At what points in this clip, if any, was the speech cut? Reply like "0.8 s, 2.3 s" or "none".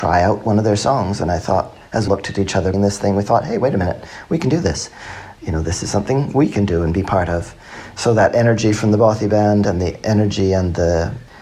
2.1 s, 2.7 s